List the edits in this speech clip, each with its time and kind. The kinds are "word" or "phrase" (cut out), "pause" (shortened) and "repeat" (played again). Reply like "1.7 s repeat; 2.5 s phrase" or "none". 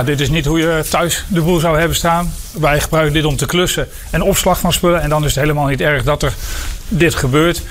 none